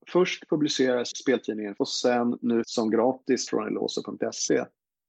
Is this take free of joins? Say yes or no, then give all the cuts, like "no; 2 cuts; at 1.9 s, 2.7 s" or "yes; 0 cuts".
no; 4 cuts; at 1.1 s, 1.8 s, 2.6 s, 3.5 s